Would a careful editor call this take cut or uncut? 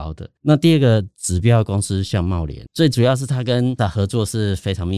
cut